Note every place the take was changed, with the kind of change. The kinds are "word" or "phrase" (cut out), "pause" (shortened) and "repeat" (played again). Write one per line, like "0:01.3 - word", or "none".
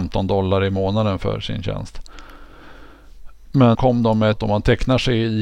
0:03.7 - word
0:04.3 - phrase